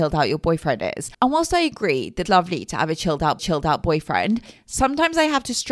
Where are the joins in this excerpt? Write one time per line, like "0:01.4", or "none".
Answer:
0:01.1
0:02.2
0:03.4